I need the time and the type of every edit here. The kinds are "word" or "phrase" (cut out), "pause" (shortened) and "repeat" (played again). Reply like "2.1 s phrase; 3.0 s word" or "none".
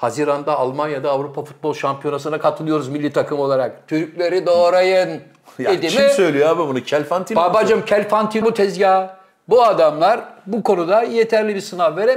8.4 s word